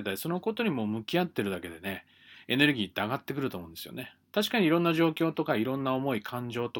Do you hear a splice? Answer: no; 0 cuts

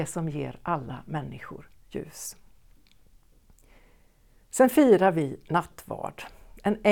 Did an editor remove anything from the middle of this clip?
no; 0 cuts

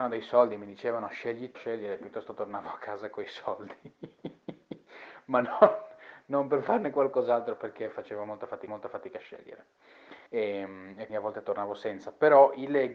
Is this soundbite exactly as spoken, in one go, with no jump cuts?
no; 4 cuts; at 1.5 s, 8.7 s, 10.3 s, 11.1 s

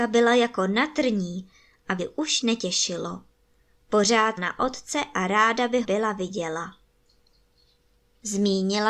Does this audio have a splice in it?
yes; 4 cuts; at 2.0 s, 2.4 s, 4.4 s, 5.8 s

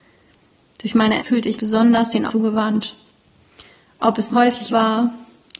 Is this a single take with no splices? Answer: no; 5 cuts; at 1.2 s, 1.6 s, 2.3 s, 4.3 s, 4.7 s

